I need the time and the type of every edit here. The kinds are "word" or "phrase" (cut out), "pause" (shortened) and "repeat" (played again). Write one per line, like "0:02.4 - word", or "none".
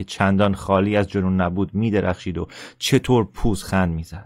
none